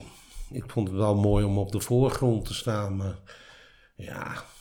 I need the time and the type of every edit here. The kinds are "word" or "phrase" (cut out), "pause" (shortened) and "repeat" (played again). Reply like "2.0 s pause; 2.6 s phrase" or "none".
none